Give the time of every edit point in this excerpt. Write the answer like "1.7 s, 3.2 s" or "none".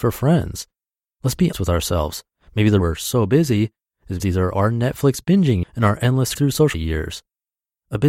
1.5 s, 2.8 s, 4.2 s, 4.5 s, 5.6 s, 6.4 s, 6.7 s